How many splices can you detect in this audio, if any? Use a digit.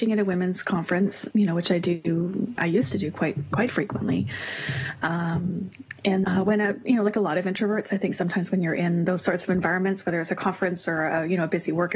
3